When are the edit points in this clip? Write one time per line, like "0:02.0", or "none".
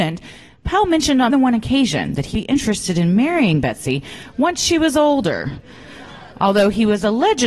0:01.3
0:02.3
0:06.3